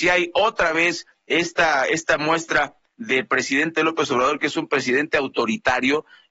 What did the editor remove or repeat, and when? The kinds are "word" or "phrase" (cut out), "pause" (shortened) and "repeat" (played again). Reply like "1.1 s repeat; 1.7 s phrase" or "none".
none